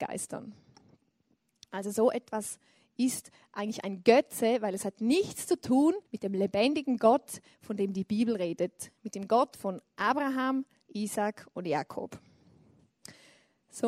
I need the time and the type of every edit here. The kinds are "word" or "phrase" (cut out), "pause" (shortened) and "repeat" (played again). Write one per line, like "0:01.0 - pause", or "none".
0:06.1 - pause